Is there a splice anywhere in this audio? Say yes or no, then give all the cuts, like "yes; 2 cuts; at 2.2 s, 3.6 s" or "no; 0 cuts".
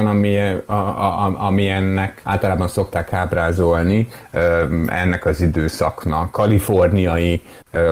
yes; 2 cuts; at 2.2 s, 6.3 s